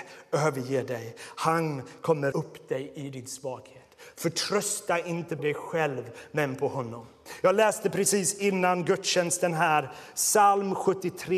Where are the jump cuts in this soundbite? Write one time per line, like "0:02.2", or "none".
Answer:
0:02.3
0:05.4